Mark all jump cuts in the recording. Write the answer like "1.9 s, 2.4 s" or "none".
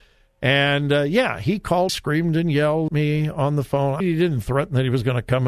1.9 s, 2.9 s, 4.0 s